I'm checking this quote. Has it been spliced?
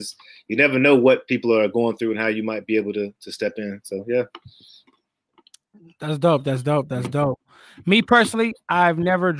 no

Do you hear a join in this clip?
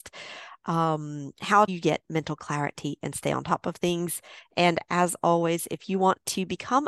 yes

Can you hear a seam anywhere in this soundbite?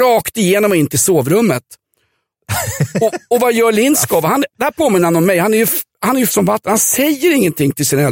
yes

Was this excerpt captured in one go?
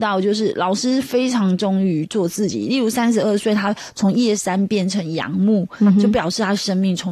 yes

